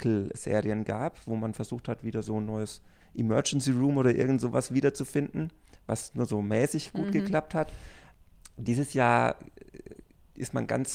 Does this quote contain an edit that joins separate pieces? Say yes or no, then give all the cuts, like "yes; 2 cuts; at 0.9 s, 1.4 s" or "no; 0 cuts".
no; 0 cuts